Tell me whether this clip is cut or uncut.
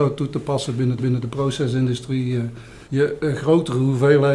cut